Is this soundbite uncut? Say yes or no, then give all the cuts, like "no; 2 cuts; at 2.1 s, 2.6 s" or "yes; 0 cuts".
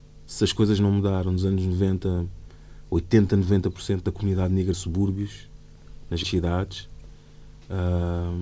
no; 2 cuts; at 4.7 s, 6.2 s